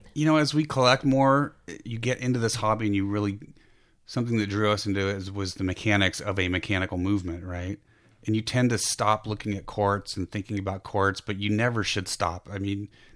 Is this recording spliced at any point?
no; 0 cuts

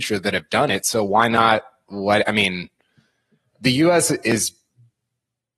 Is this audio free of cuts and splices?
yes; 0 cuts

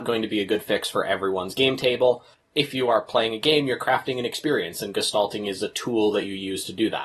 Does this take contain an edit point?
no; 0 cuts

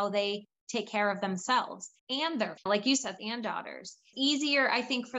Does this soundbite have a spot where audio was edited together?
yes; 4 cuts; at 2.0 s, 2.6 s, 3.2 s, 4.1 s

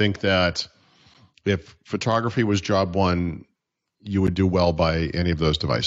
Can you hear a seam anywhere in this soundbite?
no; 0 cuts

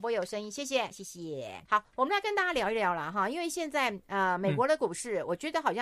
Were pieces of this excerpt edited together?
yes; 2 cuts; at 0.9 s, 1.7 s

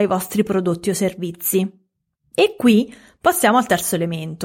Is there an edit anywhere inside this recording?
no; 0 cuts

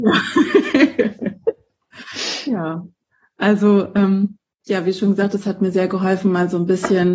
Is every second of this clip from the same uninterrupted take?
yes; 0 cuts

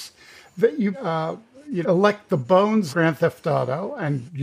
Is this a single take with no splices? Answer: no; 3 cuts; at 0.9 s, 1.8 s, 2.9 s

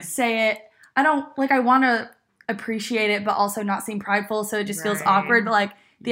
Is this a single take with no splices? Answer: yes; 0 cuts

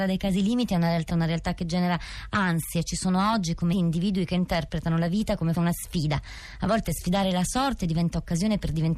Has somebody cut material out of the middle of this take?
yes; 3 cuts; at 1.1 s, 3.7 s, 5.5 s

